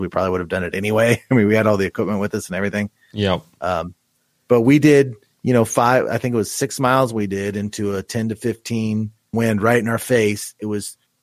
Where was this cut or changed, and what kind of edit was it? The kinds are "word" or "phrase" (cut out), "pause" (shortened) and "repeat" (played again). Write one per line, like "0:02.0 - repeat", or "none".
0:09.3 - word

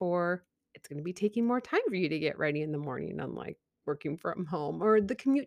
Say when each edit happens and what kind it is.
none

